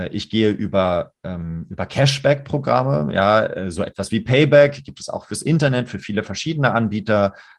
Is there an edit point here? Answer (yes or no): no